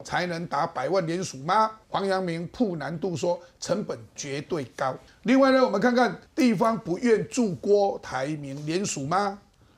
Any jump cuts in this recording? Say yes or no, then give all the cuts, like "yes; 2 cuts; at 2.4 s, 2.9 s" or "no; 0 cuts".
yes; 3 cuts; at 1.8 s, 5.1 s, 6.3 s